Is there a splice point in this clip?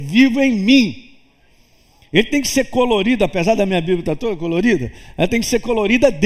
no; 0 cuts

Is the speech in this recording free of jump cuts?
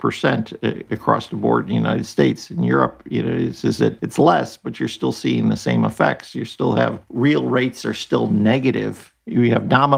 yes; 0 cuts

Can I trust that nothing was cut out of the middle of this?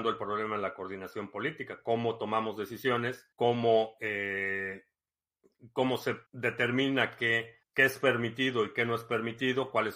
no; 3 cuts; at 3.3 s, 6.3 s, 7.6 s

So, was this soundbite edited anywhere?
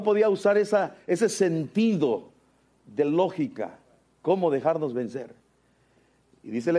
no; 0 cuts

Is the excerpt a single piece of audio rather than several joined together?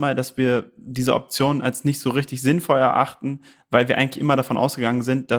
yes; 0 cuts

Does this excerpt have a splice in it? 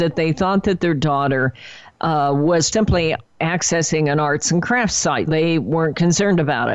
yes; 2 cuts; at 2.7 s, 5.3 s

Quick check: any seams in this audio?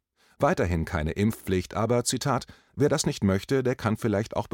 no; 0 cuts

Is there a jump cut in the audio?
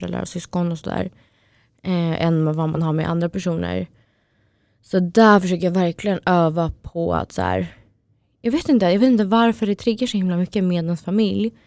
no; 0 cuts

